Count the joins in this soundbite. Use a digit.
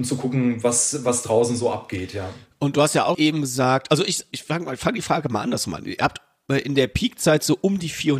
1